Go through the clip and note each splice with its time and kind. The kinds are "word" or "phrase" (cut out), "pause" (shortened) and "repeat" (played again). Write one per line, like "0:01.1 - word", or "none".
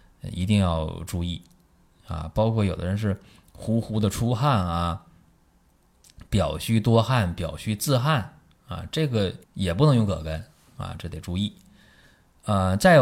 0:09.4 - pause